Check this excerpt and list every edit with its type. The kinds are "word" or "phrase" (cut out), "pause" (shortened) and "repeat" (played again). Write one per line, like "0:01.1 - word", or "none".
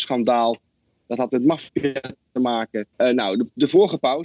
0:02.9 - pause